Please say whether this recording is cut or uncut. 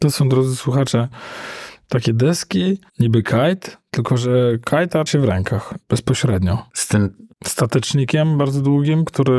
cut